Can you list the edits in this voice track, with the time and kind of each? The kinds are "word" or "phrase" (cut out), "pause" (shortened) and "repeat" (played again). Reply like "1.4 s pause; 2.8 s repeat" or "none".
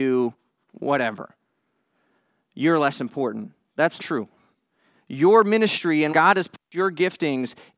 4.0 s word; 6.1 s word